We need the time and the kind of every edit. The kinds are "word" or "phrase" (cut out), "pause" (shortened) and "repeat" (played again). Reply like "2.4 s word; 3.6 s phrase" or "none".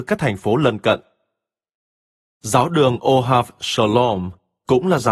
none